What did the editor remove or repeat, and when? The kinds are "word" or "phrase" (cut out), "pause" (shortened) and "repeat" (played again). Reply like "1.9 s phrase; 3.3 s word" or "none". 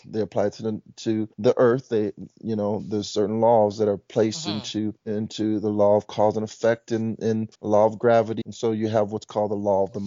1.3 s pause; 5.0 s pause; 7.5 s pause; 8.4 s word